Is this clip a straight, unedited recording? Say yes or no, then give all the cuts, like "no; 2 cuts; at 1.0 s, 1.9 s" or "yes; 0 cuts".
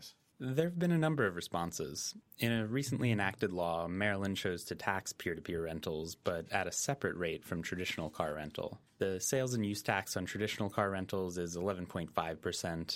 yes; 0 cuts